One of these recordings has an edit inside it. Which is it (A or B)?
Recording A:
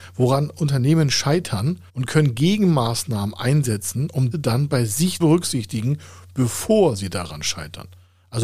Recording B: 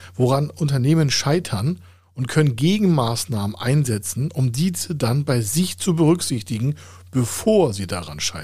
A